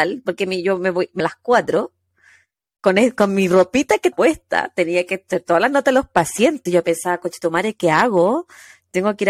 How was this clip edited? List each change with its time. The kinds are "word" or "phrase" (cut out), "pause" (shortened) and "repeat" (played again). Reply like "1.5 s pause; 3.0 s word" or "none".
1.2 s word; 4.1 s word; 6.7 s word

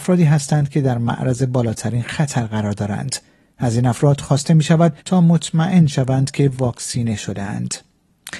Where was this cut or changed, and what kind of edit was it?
5.0 s pause

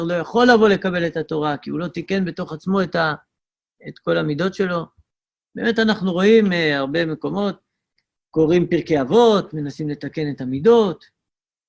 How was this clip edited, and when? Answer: none

